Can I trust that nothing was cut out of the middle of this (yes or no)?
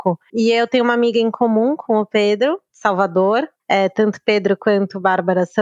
yes